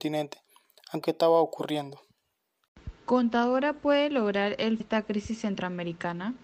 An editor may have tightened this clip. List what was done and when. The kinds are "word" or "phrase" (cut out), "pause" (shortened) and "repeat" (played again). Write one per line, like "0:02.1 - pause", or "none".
0:01.0 - phrase
0:04.8 - phrase